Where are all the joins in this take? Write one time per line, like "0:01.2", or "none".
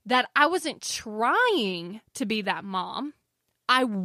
none